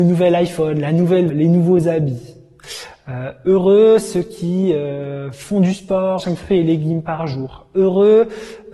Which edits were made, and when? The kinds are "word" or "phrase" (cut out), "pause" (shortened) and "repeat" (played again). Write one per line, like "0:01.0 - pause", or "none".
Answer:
0:01.3 - word
0:06.2 - word